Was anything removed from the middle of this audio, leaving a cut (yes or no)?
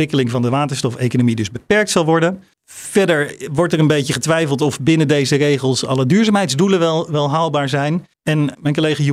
yes